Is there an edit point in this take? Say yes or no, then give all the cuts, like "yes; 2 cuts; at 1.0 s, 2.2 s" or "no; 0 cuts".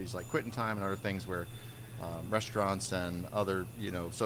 no; 0 cuts